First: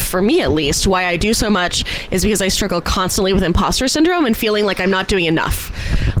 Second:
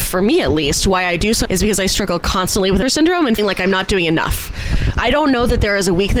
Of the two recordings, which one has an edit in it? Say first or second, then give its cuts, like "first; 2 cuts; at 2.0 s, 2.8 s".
second; 4 cuts; at 1.5 s, 2.8 s, 3.4 s, 4.9 s